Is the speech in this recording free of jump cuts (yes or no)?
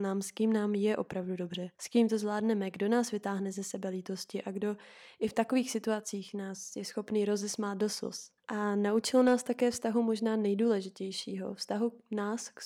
no